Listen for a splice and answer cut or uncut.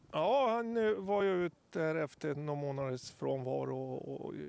uncut